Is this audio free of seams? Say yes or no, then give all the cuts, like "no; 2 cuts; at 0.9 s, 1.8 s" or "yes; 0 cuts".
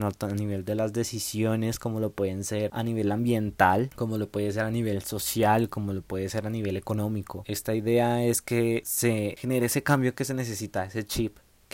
yes; 0 cuts